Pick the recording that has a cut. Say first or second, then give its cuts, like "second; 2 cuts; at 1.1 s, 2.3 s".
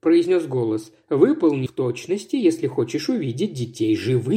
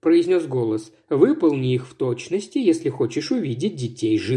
first; 1 cut; at 1.7 s